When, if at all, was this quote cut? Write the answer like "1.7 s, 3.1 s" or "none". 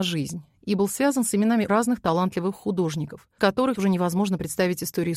1.7 s, 3.4 s, 3.8 s